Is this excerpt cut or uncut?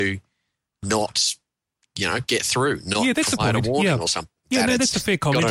uncut